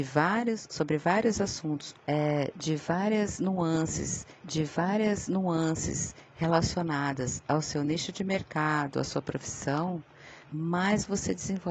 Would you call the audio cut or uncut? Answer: cut